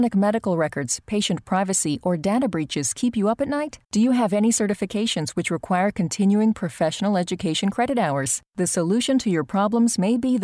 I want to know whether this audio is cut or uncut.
cut